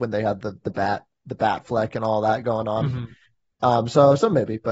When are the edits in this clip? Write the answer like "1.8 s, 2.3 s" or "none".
none

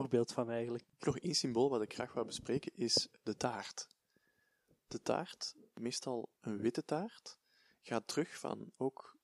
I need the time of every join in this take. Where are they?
0.9 s

